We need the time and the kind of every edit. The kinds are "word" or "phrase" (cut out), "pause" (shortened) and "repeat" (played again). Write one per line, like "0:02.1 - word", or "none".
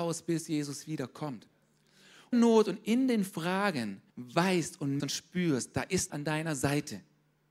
0:02.3 - phrase
0:04.1 - pause
0:05.0 - word
0:06.1 - word